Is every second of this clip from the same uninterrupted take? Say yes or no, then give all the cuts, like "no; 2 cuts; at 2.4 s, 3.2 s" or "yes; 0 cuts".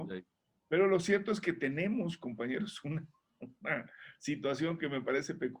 yes; 0 cuts